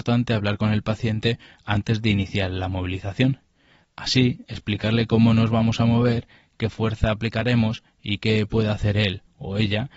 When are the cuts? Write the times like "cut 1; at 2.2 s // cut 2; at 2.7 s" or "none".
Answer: none